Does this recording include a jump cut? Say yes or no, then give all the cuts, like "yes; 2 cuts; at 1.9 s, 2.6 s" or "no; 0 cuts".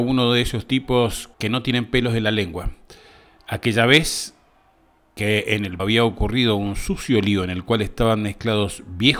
yes; 2 cuts; at 1.3 s, 5.8 s